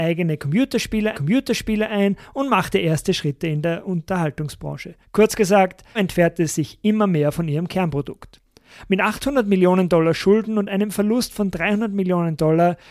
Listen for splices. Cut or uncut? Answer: cut